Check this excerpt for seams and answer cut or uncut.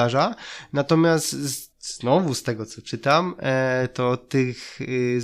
cut